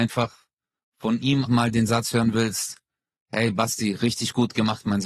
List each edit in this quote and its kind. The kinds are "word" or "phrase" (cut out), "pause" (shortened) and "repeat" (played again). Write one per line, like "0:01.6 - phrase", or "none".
0:01.5 - word